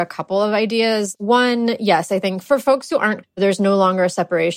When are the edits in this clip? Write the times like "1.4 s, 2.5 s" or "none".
3.2 s